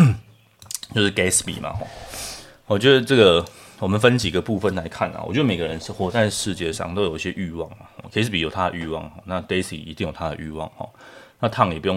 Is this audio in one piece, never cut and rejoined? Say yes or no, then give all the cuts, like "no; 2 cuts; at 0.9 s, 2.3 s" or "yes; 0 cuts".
yes; 0 cuts